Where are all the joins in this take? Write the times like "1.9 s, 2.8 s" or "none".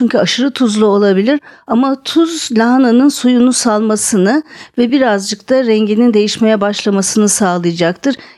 none